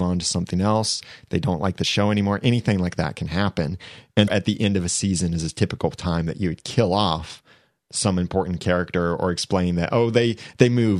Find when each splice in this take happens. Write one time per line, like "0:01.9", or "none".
0:04.3